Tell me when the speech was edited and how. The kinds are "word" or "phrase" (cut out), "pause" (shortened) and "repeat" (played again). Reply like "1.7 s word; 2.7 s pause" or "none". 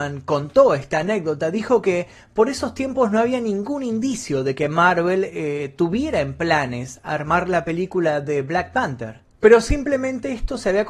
none